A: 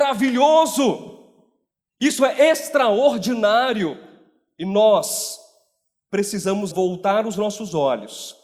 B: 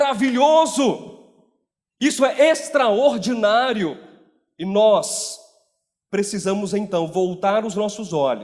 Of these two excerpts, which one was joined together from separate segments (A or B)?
A